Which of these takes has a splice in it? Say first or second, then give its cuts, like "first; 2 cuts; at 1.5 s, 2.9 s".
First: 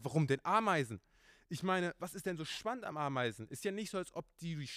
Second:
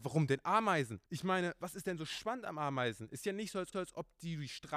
second; 2 cuts; at 1.1 s, 3.7 s